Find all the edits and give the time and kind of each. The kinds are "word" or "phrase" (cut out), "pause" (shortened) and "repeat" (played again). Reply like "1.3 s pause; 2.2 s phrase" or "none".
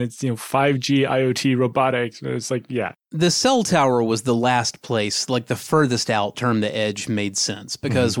6.3 s phrase